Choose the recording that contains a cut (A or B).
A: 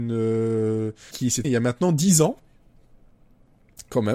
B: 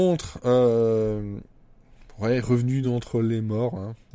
A